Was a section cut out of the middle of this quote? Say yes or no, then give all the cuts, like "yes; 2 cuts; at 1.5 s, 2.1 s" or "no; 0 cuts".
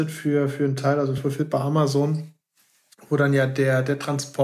no; 0 cuts